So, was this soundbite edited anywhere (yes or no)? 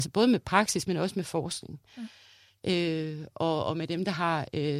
no